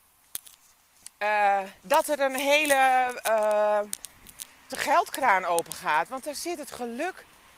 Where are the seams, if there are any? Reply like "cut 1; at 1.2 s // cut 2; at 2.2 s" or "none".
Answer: cut 1; at 1.8 s // cut 2; at 4.7 s